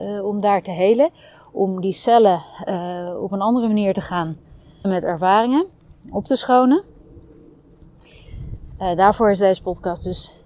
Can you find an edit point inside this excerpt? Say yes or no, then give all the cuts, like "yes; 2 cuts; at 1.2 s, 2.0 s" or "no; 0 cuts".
yes; 1 cut; at 4.8 s